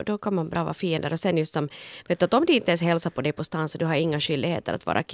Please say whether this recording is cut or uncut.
uncut